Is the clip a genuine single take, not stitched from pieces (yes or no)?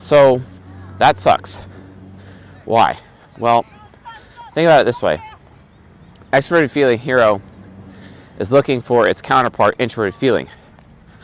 yes